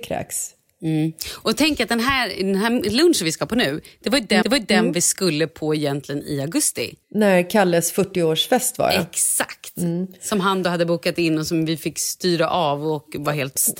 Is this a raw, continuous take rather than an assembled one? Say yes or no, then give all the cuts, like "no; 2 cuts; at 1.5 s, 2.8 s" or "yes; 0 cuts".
no; 2 cuts; at 4.4 s, 7.0 s